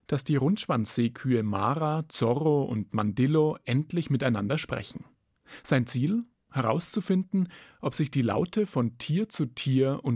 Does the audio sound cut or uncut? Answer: uncut